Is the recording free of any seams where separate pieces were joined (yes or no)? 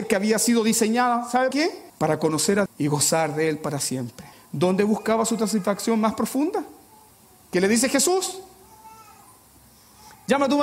no